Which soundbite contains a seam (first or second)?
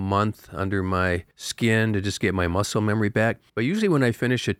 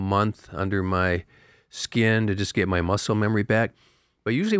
first